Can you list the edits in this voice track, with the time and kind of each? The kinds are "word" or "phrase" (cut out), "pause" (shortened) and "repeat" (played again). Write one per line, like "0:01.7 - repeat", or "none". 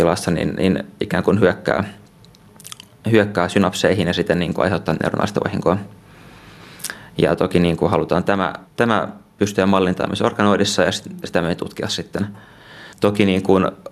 0:08.7 - pause
0:12.9 - pause